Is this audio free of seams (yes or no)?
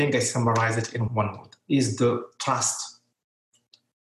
no